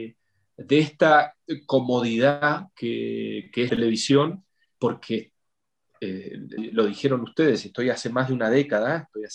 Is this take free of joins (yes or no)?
no